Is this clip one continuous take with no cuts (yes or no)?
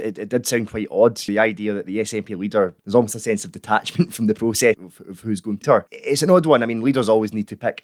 no